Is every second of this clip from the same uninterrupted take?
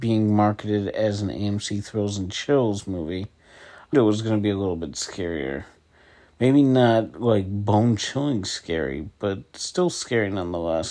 no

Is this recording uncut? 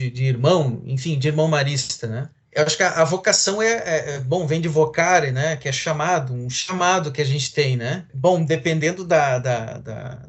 yes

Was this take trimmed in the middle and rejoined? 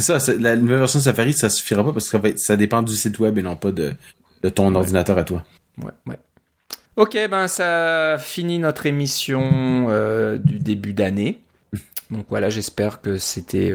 yes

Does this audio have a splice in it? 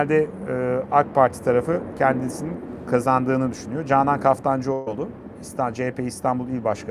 no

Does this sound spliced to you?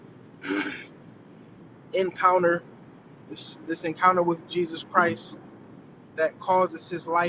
no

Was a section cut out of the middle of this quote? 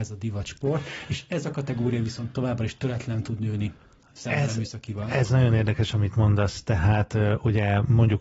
no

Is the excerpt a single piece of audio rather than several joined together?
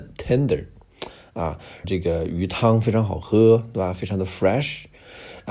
no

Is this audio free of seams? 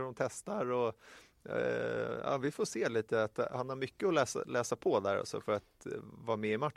yes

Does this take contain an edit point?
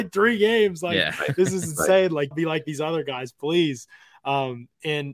yes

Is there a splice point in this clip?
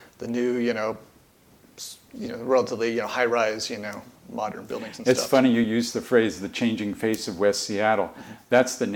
no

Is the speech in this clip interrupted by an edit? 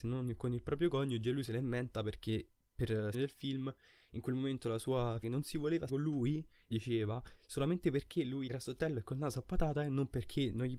yes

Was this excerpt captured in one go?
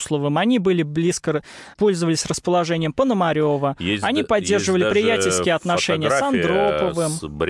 no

